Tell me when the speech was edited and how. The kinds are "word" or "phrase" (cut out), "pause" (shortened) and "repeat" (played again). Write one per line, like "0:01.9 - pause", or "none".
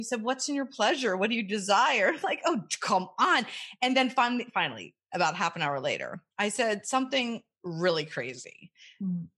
0:06.3 - pause